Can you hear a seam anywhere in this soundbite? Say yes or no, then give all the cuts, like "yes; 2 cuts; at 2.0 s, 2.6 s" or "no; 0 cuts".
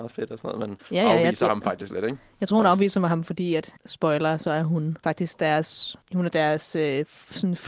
no; 0 cuts